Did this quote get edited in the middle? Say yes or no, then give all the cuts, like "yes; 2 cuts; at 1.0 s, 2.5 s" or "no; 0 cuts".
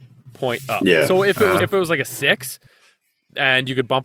yes; 1 cut; at 1.6 s